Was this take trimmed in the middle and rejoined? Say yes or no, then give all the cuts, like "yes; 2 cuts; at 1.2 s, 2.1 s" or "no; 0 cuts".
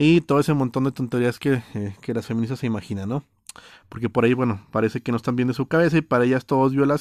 no; 0 cuts